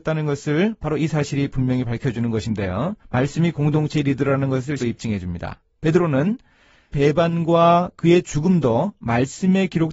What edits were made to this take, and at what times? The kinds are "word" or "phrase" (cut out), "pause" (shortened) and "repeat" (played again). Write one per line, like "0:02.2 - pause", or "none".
0:03.0 - pause
0:04.8 - word
0:06.9 - word